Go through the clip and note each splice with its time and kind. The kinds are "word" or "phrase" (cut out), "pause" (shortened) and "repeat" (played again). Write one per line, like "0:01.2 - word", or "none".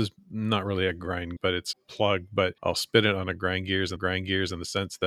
0:01.4 - word
0:01.7 - phrase
0:02.6 - pause
0:04.0 - repeat